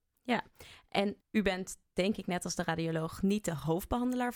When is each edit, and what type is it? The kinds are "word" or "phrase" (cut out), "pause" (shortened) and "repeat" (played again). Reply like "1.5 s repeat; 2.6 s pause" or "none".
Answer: 1.2 s pause